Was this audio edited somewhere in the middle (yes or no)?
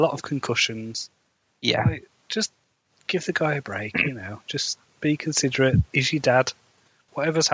no